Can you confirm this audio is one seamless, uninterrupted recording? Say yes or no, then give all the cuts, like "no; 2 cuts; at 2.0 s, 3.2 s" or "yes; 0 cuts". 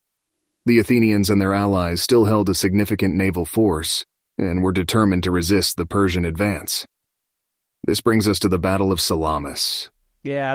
yes; 0 cuts